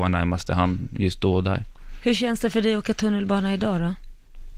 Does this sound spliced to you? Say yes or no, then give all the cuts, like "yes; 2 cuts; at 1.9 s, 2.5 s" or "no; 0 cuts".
no; 0 cuts